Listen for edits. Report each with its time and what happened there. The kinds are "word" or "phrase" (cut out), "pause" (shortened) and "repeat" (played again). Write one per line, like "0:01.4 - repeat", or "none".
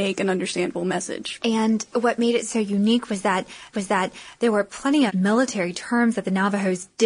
0:03.7 - repeat
0:05.1 - word

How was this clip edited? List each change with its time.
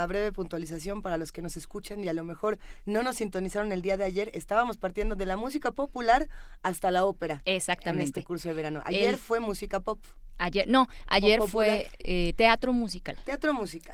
none

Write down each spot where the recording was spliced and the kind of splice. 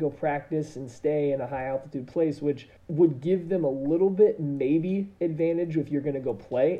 0:02.8 - pause

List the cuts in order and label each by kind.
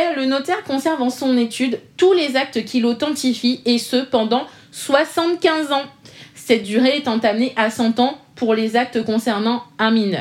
none

